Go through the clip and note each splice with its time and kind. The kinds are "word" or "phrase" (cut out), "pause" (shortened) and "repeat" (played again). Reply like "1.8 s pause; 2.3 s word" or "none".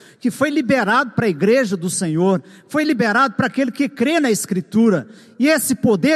none